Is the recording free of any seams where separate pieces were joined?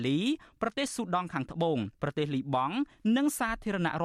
no; 1 cut; at 1.9 s

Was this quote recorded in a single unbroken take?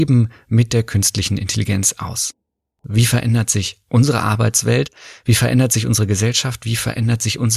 yes; 0 cuts

